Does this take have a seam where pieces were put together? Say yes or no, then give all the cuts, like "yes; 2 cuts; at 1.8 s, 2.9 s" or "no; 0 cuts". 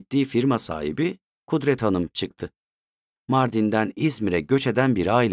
no; 0 cuts